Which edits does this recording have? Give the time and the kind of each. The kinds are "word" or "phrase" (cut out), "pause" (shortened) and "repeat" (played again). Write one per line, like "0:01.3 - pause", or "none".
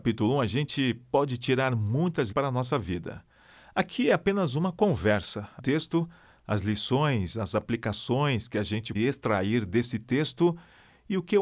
0:02.3 - word
0:05.6 - phrase
0:08.9 - word